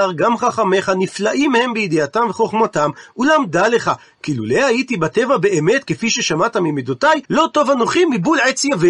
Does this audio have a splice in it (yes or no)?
yes